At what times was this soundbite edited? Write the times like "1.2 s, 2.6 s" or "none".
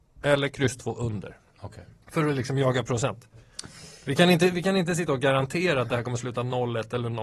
2.0 s